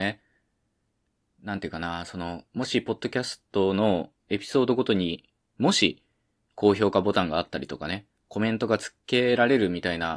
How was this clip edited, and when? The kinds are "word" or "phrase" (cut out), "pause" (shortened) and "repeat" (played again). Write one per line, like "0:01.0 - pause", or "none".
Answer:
0:02.5 - pause